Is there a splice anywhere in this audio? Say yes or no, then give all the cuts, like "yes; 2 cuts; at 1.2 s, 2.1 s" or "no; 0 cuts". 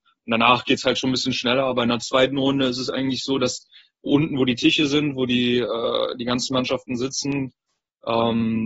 no; 0 cuts